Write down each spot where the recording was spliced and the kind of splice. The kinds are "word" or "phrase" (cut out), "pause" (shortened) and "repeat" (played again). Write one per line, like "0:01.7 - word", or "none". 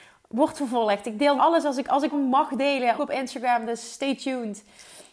0:01.4 - word
0:02.1 - phrase
0:03.0 - phrase